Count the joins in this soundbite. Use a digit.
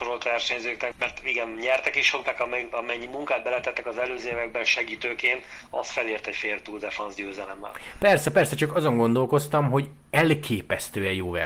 2